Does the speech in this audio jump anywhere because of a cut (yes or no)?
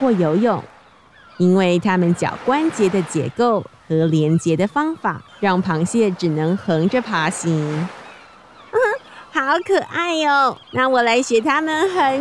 yes